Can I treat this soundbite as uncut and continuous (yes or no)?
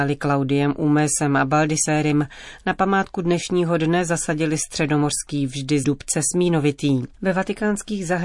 no